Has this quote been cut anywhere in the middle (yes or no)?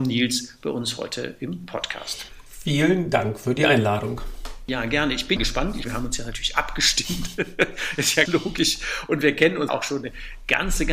yes